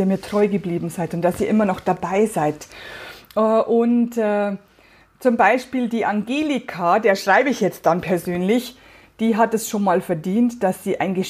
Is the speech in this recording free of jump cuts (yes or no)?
yes